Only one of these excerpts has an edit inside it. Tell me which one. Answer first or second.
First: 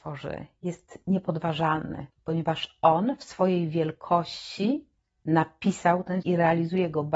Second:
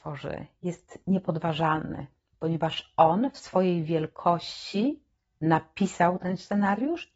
first